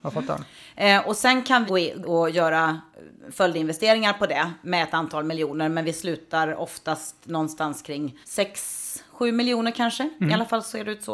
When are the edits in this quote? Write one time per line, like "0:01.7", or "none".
0:01.7
0:02.0
0:08.2